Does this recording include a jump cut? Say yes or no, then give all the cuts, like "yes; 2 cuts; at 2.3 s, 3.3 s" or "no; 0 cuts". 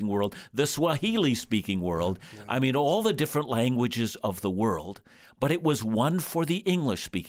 no; 0 cuts